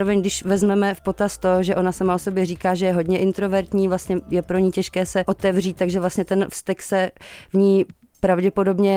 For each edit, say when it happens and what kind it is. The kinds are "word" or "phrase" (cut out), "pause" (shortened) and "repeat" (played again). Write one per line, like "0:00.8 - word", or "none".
0:05.2 - word